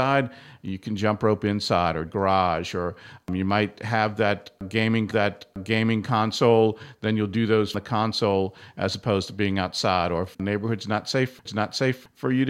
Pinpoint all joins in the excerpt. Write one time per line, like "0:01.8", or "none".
0:02.1
0:05.1
0:07.7
0:10.3
0:11.5